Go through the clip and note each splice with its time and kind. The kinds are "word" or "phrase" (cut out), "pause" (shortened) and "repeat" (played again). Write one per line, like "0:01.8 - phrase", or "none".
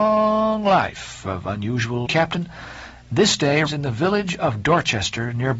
0:02.1 - phrase
0:03.7 - word

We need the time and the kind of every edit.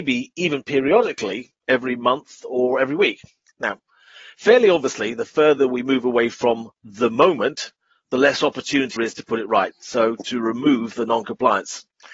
0:09.0 - word

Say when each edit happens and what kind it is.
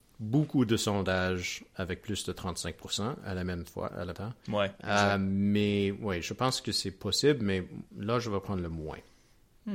0:04.1 - word
0:07.9 - pause

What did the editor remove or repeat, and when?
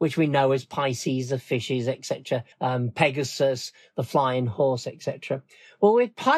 0:02.5 - pause

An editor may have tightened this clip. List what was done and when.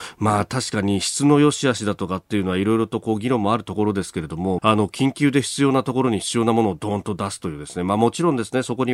0:04.6 - phrase

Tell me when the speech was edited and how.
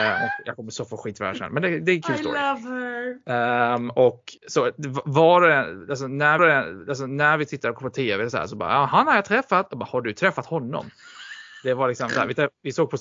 0:04.4 - pause
0:06.4 - repeat

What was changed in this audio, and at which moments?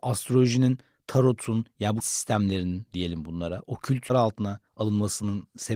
0:02.0 - phrase
0:04.1 - phrase
0:04.7 - pause

